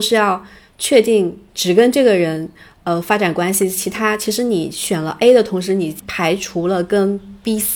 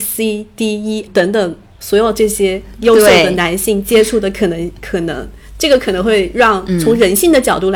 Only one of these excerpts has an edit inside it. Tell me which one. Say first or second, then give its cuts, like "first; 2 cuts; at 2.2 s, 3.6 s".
second; 1 cut; at 1.1 s